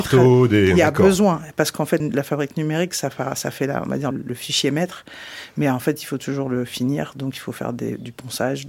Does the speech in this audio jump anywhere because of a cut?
yes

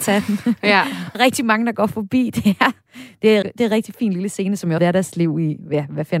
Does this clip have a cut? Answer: yes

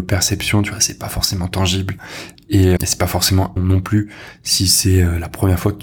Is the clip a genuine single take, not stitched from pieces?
no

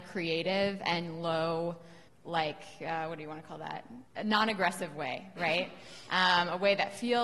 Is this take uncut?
no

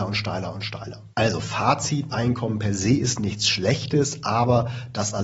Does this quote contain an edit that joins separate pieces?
yes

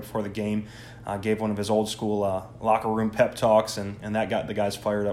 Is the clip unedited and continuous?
yes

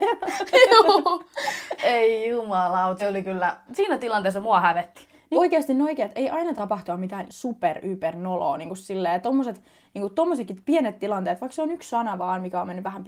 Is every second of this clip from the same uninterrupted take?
no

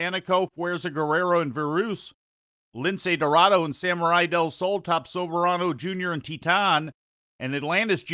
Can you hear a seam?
no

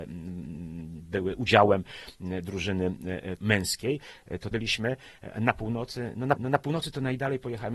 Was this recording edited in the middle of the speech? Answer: yes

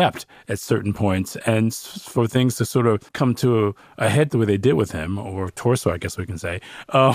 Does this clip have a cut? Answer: yes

